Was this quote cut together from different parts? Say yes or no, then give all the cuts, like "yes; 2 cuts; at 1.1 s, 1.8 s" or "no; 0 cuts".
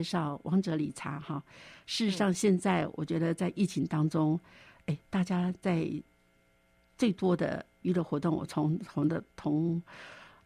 no; 0 cuts